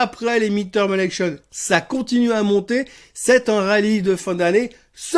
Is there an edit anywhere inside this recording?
no; 0 cuts

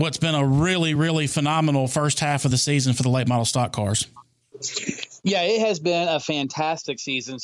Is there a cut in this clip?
no; 0 cuts

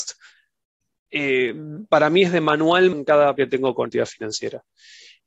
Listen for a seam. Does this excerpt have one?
yes; 3 cuts; at 2.9 s, 3.4 s, 3.9 s

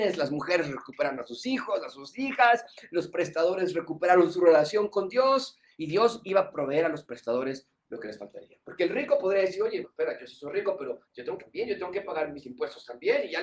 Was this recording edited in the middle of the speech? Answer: yes; 3 cuts; at 9.8 s, 11.0 s, 11.4 s

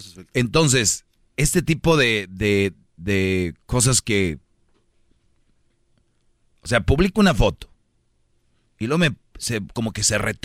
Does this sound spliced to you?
no; 0 cuts

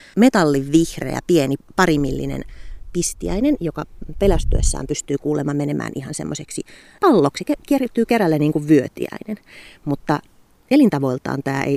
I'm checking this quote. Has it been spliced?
no; 0 cuts

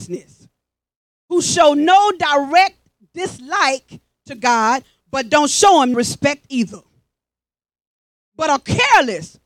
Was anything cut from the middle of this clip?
yes; 1 cut; at 5.9 s

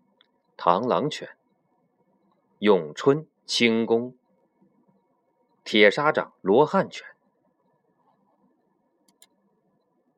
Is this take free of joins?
no; 2 cuts; at 3.4 s, 6.4 s

